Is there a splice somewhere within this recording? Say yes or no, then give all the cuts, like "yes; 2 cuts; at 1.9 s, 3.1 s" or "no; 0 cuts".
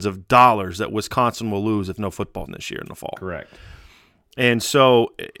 yes; 2 cuts; at 2.0 s, 2.5 s